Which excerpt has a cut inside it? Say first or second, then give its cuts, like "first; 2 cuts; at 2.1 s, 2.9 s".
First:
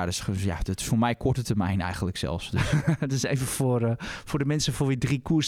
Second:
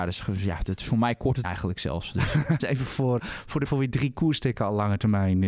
second; 4 cuts; at 1.4 s, 2.6 s, 3.2 s, 3.7 s